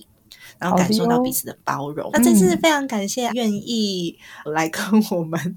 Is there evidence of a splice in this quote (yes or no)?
yes